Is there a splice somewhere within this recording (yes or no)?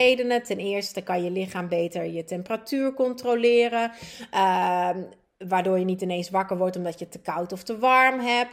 no